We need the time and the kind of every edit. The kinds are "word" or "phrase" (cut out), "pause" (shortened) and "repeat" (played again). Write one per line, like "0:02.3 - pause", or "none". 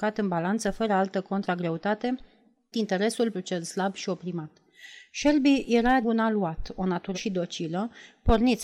0:02.7 - word
0:03.3 - word
0:06.0 - word
0:07.1 - word